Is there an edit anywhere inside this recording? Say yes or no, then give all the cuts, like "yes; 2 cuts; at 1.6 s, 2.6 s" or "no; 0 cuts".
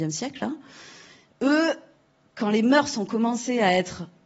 no; 0 cuts